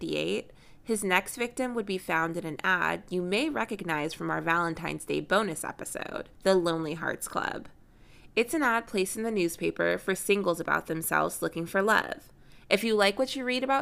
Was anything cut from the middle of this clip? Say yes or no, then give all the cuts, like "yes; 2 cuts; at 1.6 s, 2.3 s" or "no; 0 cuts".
yes; 1 cut; at 6.3 s